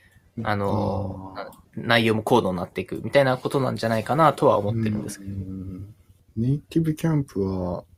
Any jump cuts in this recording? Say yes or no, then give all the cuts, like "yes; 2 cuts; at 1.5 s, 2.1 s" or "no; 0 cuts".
no; 0 cuts